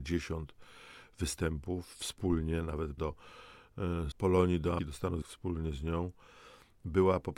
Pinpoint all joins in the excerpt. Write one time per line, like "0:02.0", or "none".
0:03.0
0:04.1
0:04.8
0:05.2